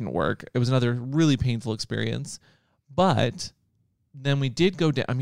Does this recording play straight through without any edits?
yes; 0 cuts

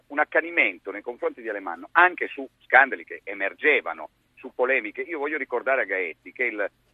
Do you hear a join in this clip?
no; 0 cuts

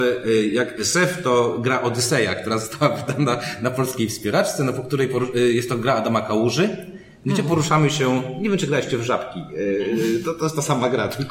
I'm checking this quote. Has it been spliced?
no; 0 cuts

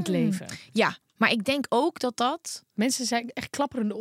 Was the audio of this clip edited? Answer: no; 0 cuts

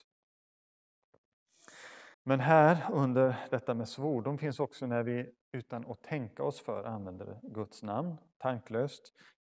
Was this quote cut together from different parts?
yes; 2 cuts; at 2.1 s, 5.4 s

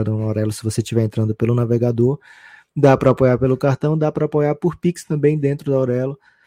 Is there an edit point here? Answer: no; 0 cuts

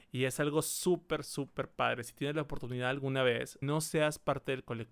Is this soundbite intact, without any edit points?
no; 1 cut; at 3.6 s

